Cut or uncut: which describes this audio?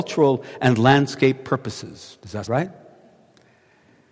cut